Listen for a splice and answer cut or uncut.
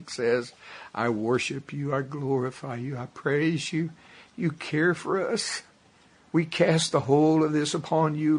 uncut